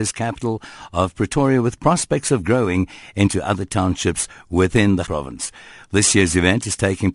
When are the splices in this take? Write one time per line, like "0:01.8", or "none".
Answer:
0:05.1